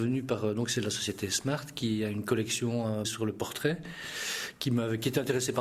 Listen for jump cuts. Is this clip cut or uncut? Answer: cut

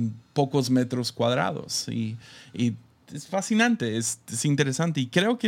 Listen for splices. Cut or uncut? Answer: uncut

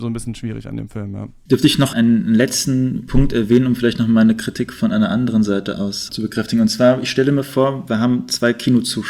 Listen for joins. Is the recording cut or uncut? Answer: cut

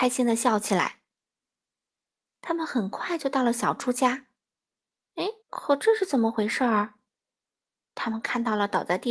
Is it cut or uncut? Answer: cut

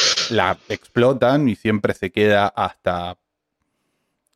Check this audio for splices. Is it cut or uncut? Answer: uncut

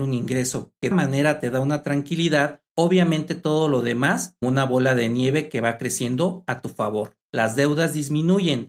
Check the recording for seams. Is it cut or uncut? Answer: cut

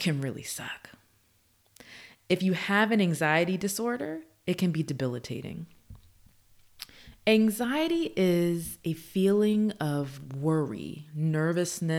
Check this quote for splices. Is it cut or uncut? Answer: uncut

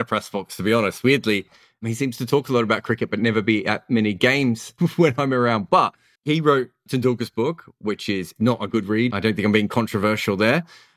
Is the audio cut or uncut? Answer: cut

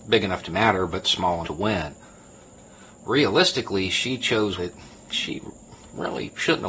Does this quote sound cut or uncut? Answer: cut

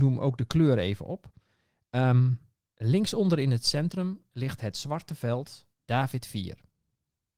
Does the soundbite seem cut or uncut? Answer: cut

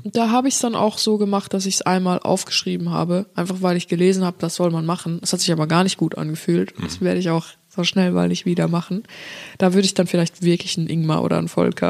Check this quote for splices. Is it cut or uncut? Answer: uncut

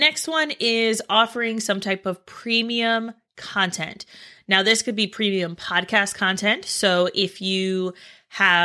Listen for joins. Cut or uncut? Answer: uncut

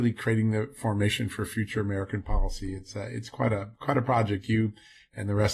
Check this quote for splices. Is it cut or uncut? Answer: uncut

